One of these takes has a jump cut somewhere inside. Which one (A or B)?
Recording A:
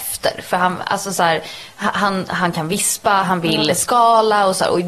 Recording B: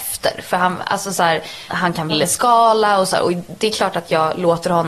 B